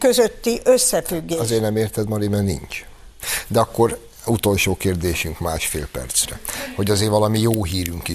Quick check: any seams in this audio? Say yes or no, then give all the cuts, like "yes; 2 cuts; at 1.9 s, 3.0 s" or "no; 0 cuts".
no; 0 cuts